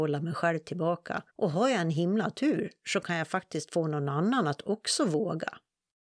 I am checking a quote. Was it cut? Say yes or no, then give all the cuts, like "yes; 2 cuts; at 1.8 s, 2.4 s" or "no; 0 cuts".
yes; 1 cut; at 1.3 s